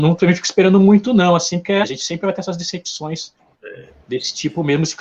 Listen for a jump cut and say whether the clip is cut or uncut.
cut